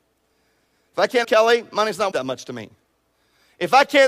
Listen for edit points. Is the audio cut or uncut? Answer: cut